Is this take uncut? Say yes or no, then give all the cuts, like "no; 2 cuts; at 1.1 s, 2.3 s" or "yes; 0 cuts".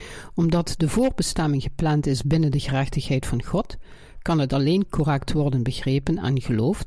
yes; 0 cuts